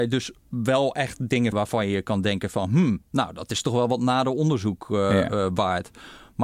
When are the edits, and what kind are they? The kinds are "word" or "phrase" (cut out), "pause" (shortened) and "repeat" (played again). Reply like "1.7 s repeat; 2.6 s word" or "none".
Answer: 1.5 s word